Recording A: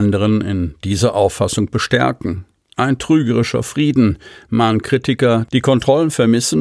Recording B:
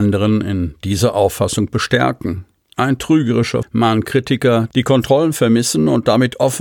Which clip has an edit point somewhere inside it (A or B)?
B